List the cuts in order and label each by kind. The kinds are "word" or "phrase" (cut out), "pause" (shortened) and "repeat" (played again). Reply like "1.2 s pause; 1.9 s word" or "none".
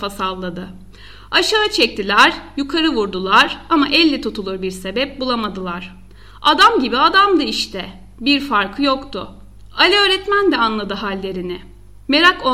none